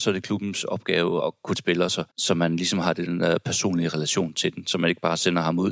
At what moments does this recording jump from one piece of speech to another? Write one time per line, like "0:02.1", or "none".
0:01.2
0:01.5
0:02.1